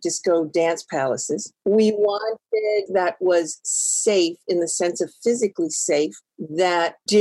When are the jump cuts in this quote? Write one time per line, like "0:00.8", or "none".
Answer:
0:02.9